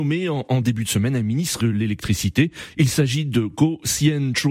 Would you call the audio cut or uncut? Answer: cut